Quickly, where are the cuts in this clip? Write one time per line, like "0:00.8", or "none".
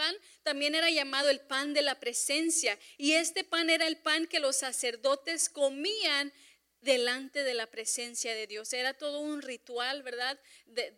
none